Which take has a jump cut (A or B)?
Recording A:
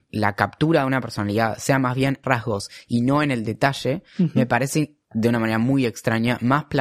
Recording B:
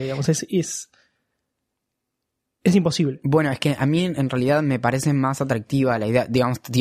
A